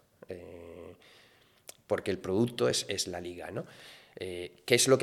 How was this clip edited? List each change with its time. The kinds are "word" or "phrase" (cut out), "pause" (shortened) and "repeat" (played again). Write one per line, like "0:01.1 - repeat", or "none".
none